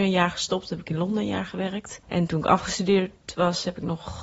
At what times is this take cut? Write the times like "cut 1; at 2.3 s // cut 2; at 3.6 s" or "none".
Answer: cut 1; at 2.0 s